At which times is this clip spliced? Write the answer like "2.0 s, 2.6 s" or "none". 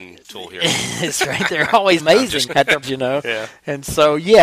2.0 s, 2.5 s, 2.8 s